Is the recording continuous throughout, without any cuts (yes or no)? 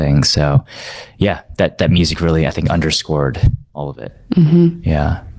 yes